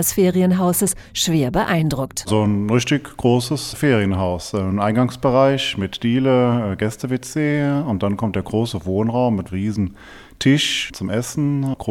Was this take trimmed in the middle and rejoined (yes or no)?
yes